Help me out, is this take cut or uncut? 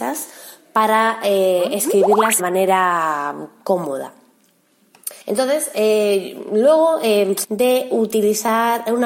cut